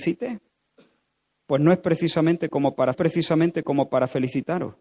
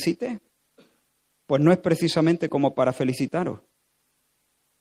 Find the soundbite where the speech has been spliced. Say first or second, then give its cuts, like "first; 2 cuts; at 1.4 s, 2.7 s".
first; 1 cut; at 2.9 s